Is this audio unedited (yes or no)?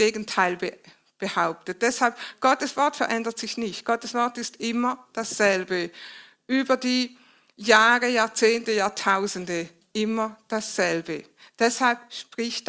no